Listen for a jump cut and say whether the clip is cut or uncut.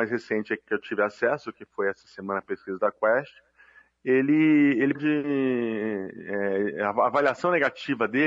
cut